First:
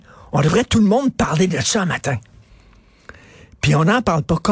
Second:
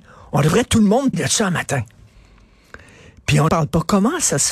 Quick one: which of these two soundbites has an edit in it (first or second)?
second